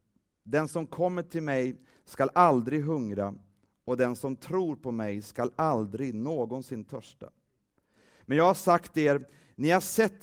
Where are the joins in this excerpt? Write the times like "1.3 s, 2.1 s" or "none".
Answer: none

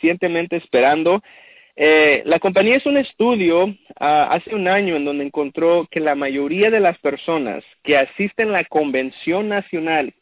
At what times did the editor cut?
none

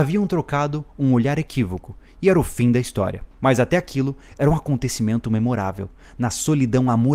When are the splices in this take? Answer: 3.3 s

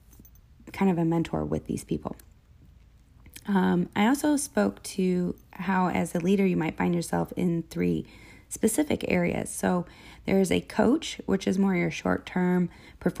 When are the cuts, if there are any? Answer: none

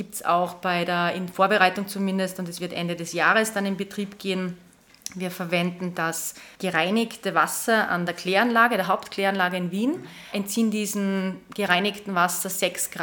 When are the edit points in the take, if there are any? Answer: 6.5 s

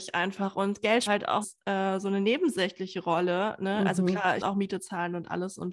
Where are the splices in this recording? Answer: 1.1 s, 1.4 s, 4.4 s

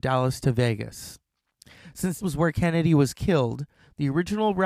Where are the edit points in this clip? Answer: 2.2 s

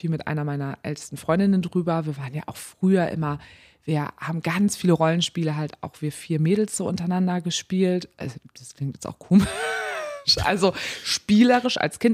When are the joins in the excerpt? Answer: none

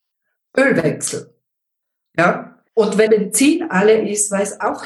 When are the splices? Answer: 2.7 s, 3.1 s

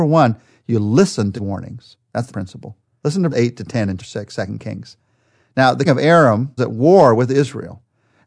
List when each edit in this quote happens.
1.4 s, 2.3 s, 3.3 s, 4.0 s, 5.9 s, 6.6 s

